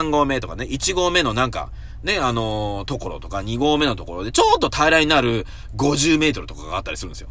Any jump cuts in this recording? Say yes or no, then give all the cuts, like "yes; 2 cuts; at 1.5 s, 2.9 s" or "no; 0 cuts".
no; 0 cuts